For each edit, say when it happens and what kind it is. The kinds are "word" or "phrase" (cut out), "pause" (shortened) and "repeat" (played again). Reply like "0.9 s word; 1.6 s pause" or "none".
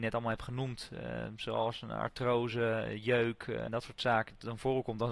3.7 s word